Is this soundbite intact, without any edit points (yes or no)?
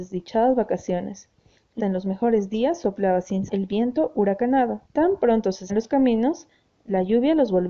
no